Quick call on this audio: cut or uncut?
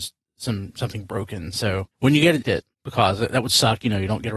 cut